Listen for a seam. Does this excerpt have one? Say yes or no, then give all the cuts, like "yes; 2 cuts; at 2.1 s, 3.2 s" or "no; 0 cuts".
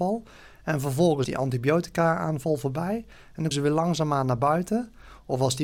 yes; 2 cuts; at 1.2 s, 3.5 s